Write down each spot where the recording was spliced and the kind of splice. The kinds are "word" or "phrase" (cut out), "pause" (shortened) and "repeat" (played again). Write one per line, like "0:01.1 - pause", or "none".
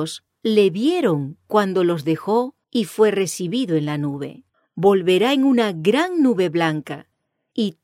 0:02.6 - pause
0:04.5 - pause